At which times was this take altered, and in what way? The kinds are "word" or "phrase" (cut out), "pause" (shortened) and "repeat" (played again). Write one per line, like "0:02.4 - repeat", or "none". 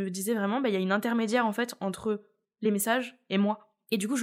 none